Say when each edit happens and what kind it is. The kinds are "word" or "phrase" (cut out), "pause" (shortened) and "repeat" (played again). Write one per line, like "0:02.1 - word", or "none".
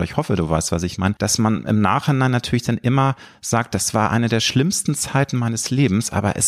none